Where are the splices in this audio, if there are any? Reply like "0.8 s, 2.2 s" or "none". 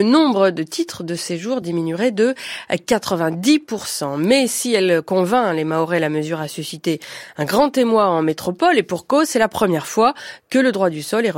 none